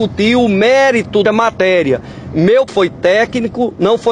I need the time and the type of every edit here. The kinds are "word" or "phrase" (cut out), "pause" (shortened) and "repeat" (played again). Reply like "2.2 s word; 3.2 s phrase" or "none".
1.2 s word; 2.7 s word